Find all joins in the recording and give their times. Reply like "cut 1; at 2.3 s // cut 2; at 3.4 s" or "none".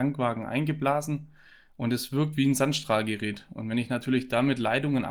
none